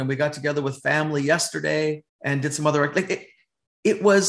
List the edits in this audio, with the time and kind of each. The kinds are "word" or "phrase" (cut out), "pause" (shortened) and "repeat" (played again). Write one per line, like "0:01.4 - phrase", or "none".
0:02.1 - pause